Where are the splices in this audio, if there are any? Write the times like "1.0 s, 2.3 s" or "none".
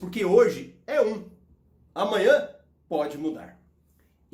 none